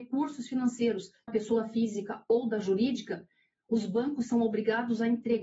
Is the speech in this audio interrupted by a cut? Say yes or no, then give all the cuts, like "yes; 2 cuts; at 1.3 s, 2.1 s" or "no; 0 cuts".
yes; 1 cut; at 1.3 s